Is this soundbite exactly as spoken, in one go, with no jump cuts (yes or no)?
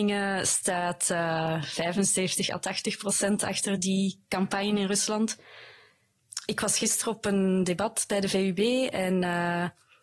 yes